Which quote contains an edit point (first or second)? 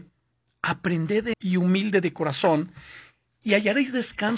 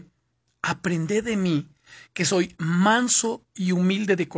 first